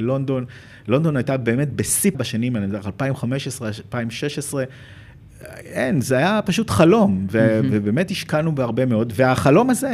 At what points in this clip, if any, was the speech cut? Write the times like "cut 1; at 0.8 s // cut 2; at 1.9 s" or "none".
cut 1; at 2.1 s